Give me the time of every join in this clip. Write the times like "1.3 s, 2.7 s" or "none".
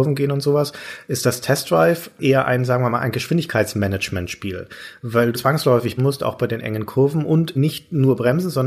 5.3 s, 6.0 s, 7.6 s